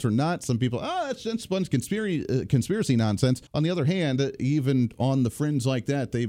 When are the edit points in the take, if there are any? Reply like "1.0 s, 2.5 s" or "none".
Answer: 3.5 s